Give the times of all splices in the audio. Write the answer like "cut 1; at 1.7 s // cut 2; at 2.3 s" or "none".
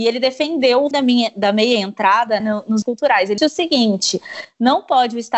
cut 1; at 0.9 s // cut 2; at 2.4 s // cut 3; at 2.8 s // cut 4; at 3.4 s